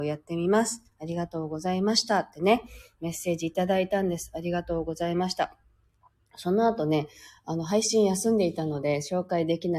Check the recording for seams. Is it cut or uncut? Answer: uncut